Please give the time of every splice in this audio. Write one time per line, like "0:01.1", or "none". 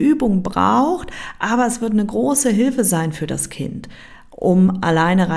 none